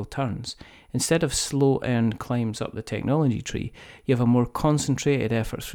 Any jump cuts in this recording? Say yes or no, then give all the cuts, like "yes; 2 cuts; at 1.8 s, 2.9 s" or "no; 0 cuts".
no; 0 cuts